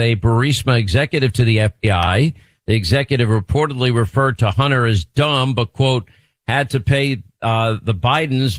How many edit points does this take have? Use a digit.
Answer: 0